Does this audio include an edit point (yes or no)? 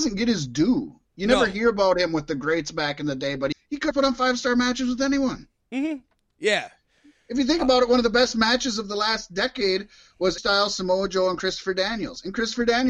yes